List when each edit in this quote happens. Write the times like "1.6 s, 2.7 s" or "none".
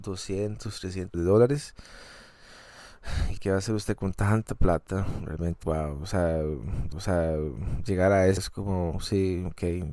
1.1 s, 3.4 s, 5.6 s, 6.9 s, 8.4 s